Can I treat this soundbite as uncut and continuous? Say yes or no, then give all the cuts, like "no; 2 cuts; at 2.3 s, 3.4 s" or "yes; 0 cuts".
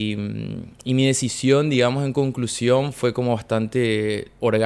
yes; 0 cuts